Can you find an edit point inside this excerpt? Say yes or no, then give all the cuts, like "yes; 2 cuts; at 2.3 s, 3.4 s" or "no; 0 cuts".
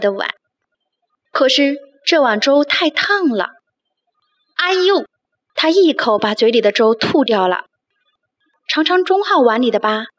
no; 0 cuts